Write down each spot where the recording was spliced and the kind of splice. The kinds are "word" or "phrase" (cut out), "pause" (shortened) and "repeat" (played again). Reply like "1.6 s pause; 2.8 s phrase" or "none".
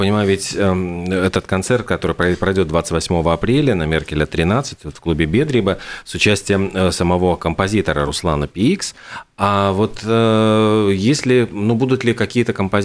none

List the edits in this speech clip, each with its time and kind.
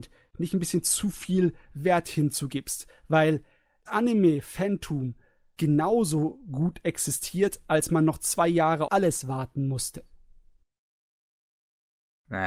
3.9 s word; 5.6 s word; 8.9 s word

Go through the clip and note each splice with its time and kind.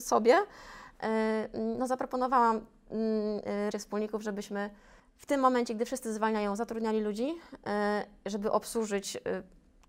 3.7 s word; 5.0 s pause

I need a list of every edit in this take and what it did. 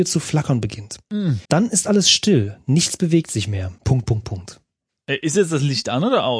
1.4 s pause; 3.8 s pause

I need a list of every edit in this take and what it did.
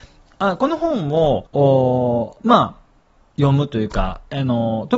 1.5 s pause

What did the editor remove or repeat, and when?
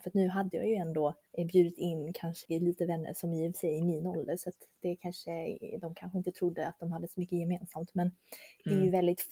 2.4 s word

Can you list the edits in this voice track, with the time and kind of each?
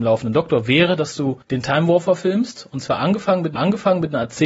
1.4 s pause; 3.6 s repeat

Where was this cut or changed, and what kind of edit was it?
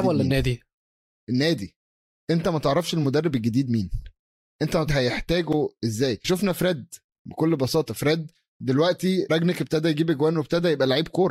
4.9 s phrase; 6.2 s word; 9.3 s word

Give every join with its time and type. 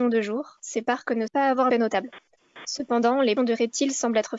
1.3 s word; 1.7 s word; 3.4 s word

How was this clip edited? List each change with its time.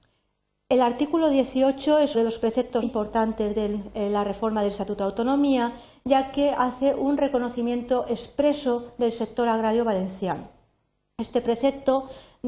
2.1 s word; 2.8 s word

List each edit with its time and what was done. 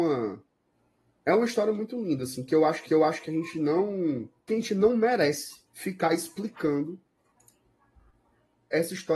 2.9 s repeat; 4.5 s phrase; 5.7 s pause

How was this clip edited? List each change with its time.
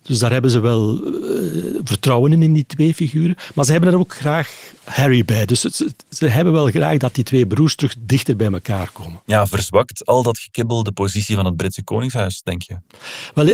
none

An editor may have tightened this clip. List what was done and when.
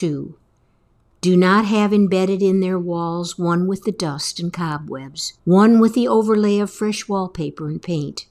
5.4 s pause

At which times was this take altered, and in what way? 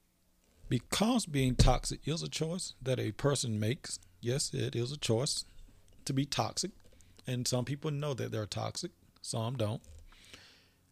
none

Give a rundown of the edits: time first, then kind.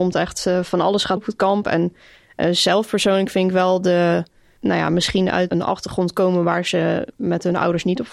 1.2 s word; 4.6 s phrase; 5.5 s word

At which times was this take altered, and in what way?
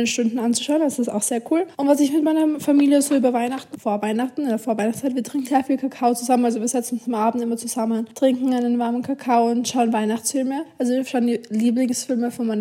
1.7 s pause; 3.7 s phrase; 5.5 s word

